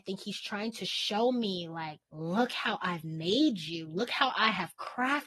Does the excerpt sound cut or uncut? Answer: cut